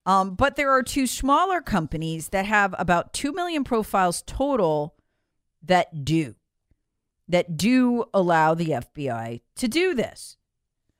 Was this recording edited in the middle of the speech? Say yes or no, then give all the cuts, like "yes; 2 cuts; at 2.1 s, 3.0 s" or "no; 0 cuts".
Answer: no; 0 cuts